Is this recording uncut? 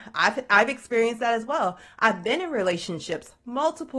yes; 0 cuts

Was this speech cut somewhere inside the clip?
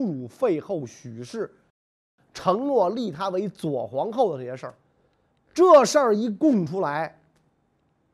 no; 0 cuts

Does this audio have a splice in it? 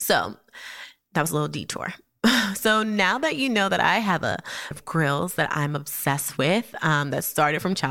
yes; 1 cut; at 4.7 s

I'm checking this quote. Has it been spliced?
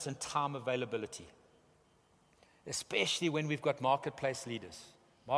no; 0 cuts

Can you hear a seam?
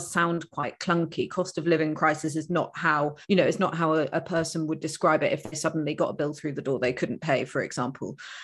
yes; 1 cut; at 3.2 s

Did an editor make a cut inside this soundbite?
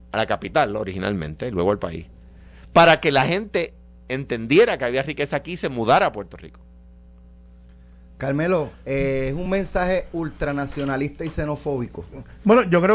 no; 0 cuts

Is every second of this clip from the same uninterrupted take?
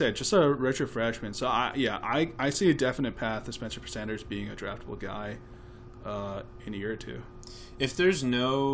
yes; 0 cuts

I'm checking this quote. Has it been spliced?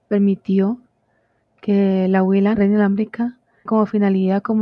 yes; 2 cuts; at 2.5 s, 3.7 s

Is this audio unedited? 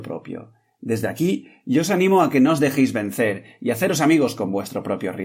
yes; 0 cuts

